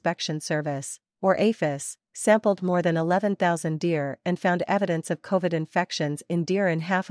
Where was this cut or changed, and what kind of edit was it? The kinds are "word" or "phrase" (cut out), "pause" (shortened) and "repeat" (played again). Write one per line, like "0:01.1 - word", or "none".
none